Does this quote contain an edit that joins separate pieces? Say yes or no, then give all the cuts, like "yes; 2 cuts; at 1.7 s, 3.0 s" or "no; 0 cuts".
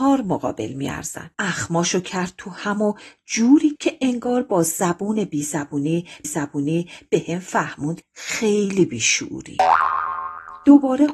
yes; 4 cuts; at 1.3 s, 3.7 s, 6.2 s, 8.0 s